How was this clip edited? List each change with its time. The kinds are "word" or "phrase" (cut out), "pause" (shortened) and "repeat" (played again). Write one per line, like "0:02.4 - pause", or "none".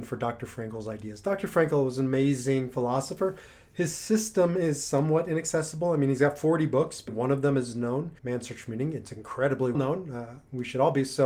0:07.1 - word
0:08.2 - pause
0:09.7 - word